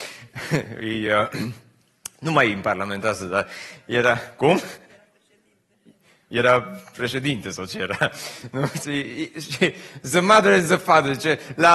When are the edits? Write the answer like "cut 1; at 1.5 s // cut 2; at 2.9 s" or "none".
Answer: none